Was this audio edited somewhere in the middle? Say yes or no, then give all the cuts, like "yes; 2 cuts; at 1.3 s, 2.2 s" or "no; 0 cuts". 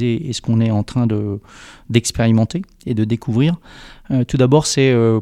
no; 0 cuts